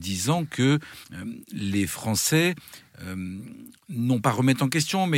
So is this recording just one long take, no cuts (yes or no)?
no